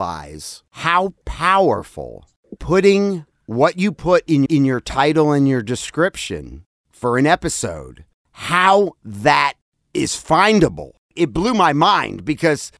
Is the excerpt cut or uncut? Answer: cut